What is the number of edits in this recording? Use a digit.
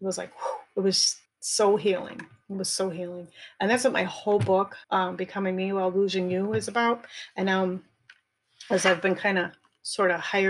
2